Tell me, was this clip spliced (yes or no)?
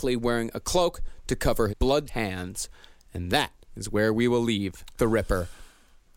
yes